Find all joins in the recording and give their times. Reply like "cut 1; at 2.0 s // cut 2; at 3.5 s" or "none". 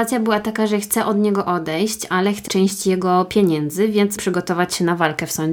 cut 1; at 2.5 s // cut 2; at 4.2 s